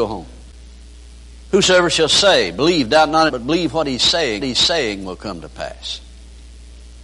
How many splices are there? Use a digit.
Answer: 2